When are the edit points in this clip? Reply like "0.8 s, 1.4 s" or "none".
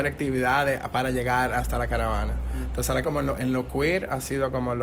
3.0 s

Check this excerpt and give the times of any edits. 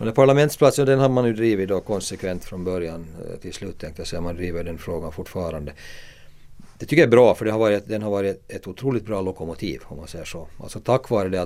none

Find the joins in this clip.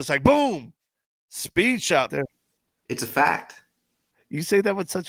2.1 s

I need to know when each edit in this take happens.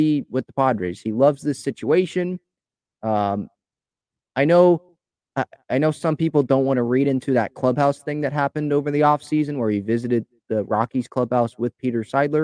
none

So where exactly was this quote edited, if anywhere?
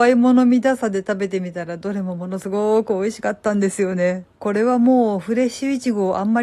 4.3 s

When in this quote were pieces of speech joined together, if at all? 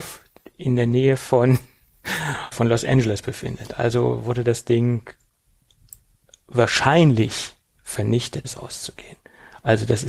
2.5 s, 8.4 s

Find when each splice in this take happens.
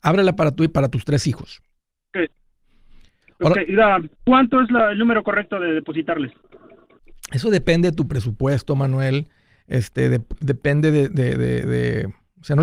none

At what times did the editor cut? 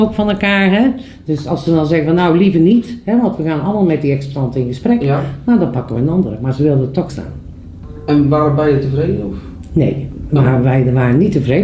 7.1 s

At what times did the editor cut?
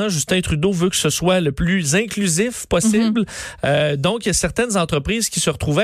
none

